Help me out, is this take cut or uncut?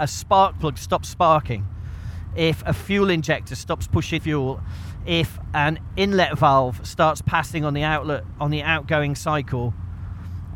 cut